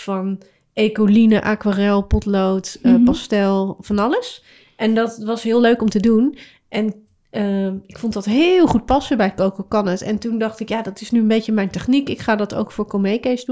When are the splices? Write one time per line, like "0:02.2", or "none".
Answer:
none